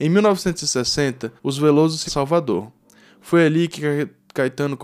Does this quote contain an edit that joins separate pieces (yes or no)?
yes